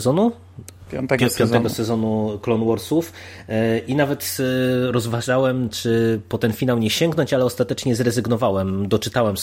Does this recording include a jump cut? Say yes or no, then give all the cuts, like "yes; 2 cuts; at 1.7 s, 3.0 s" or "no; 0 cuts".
no; 0 cuts